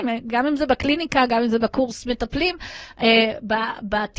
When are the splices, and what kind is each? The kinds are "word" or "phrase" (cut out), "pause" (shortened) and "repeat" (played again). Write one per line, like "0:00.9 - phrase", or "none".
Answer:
none